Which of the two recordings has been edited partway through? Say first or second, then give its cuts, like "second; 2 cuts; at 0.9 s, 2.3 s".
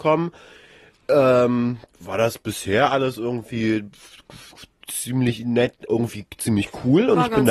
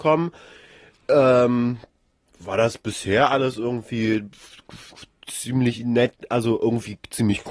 first; 2 cuts; at 1.9 s, 5.9 s